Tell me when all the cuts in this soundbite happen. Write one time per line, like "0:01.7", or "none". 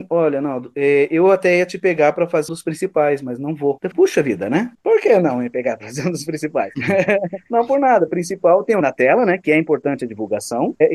0:02.5
0:03.9
0:08.1
0:08.8